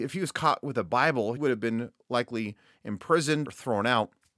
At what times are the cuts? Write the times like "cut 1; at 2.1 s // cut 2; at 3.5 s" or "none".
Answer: cut 1; at 1.4 s // cut 2; at 3.4 s